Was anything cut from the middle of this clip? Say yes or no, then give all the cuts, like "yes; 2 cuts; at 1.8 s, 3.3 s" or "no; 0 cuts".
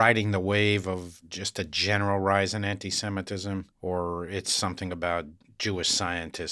yes; 1 cut; at 3.7 s